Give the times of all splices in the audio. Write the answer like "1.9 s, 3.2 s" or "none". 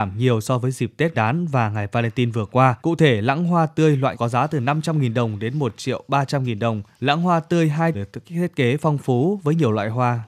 1.1 s, 2.8 s, 4.1 s, 6.9 s, 7.9 s